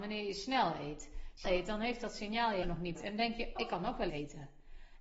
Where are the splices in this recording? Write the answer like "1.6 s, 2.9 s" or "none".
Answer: 1.4 s, 2.6 s, 3.0 s, 3.6 s, 4.1 s

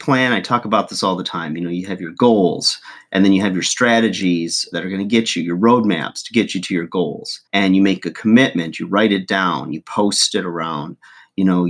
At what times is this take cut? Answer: 4.7 s, 7.5 s

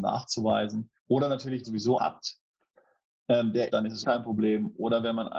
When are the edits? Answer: 1.0 s, 1.6 s, 2.0 s, 3.7 s, 4.0 s

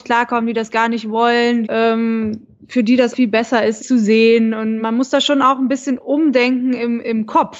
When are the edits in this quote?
1.6 s, 3.1 s, 3.8 s, 4.8 s

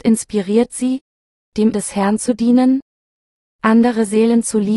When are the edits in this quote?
1.7 s

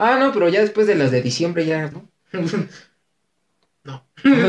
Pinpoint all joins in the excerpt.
1.9 s

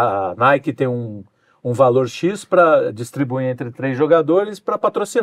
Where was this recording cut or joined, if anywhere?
none

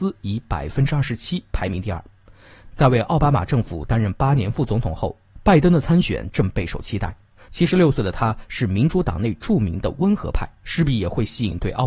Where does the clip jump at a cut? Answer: none

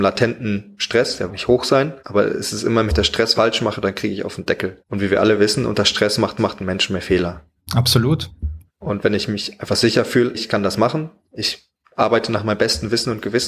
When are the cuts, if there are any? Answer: 1.3 s, 2.0 s, 2.9 s, 3.3 s, 4.8 s, 6.4 s, 8.7 s, 10.3 s

